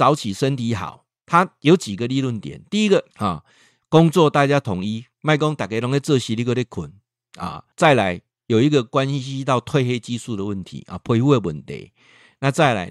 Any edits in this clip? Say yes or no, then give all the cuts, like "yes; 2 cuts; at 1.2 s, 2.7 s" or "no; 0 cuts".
yes; 3 cuts; at 3.1 s, 5.1 s, 7.7 s